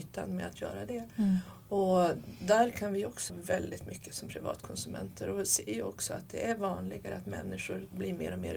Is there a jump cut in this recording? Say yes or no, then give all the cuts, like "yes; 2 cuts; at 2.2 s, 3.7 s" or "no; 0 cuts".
yes; 1 cut; at 3.3 s